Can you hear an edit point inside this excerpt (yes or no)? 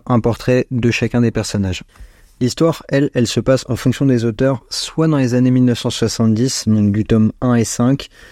no